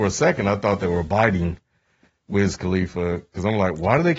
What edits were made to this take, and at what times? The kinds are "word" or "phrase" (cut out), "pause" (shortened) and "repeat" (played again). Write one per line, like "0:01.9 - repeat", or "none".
none